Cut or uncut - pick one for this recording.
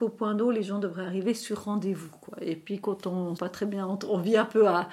cut